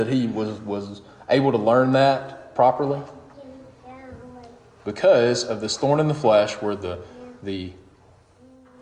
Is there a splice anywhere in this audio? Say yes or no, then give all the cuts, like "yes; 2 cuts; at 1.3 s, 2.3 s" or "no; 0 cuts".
no; 0 cuts